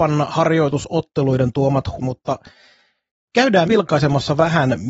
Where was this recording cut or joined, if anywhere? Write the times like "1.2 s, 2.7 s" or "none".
2.0 s, 3.7 s

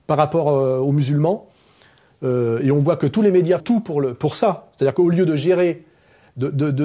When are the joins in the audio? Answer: 3.6 s

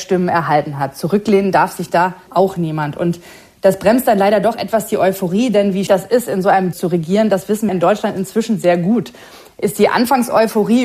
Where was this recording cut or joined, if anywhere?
2.3 s, 5.9 s, 6.7 s, 7.7 s

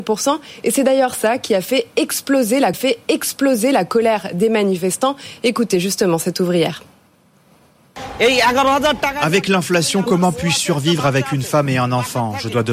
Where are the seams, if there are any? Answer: 2.7 s

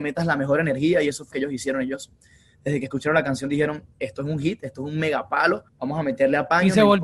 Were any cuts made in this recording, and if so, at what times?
1.3 s, 5.7 s

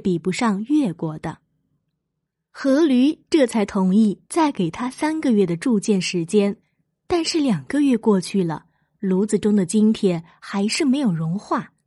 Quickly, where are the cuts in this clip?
none

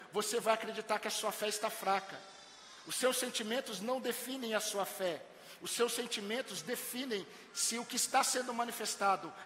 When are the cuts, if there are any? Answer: none

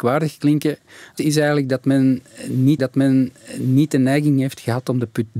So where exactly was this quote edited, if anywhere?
1.2 s, 2.8 s

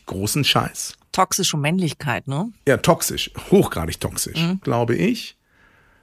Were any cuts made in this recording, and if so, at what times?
4.6 s

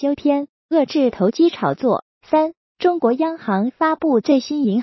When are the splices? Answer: 2.1 s

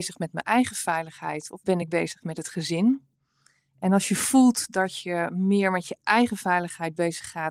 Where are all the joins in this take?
none

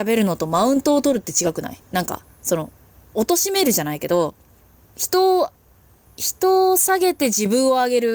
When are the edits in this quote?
none

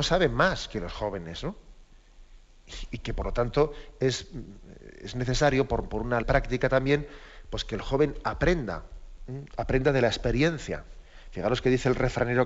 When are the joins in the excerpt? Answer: 6.2 s

